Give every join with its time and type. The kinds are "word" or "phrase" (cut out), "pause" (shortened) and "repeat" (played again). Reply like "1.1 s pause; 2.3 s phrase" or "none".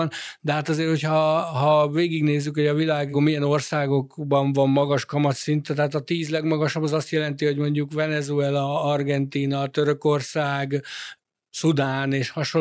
none